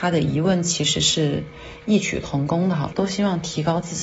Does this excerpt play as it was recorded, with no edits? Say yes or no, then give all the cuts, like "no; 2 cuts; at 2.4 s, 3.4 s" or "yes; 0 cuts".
no; 1 cut; at 2.9 s